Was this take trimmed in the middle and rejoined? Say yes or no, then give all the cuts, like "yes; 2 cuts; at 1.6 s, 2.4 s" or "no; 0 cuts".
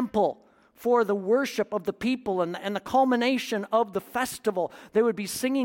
no; 0 cuts